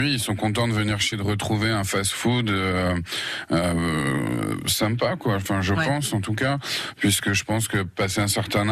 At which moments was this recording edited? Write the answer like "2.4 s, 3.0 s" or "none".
1.1 s